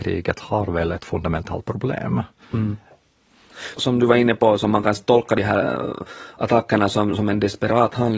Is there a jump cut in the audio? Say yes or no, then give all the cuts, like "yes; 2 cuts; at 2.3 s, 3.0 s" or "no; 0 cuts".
no; 0 cuts